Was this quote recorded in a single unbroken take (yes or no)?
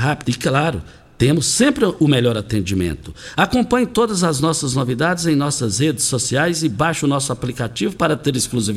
yes